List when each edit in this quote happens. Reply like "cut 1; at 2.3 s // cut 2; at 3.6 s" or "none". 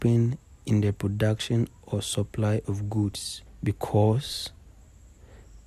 cut 1; at 3.5 s